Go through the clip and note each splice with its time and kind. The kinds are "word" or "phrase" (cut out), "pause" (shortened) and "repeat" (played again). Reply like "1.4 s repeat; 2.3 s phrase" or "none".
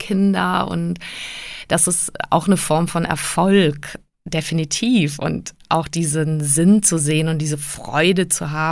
none